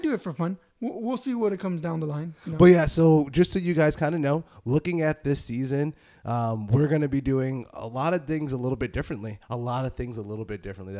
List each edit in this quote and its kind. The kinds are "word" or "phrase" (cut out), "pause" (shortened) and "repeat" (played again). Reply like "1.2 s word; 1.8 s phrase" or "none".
none